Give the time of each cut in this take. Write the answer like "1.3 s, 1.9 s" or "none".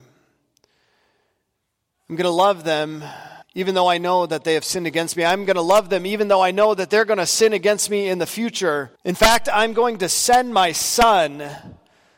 3.4 s, 8.9 s

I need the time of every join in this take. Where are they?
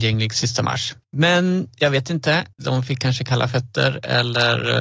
1.0 s, 2.5 s

